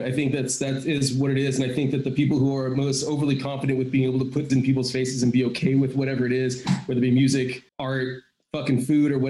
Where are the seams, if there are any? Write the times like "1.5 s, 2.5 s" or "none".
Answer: 4.5 s, 7.7 s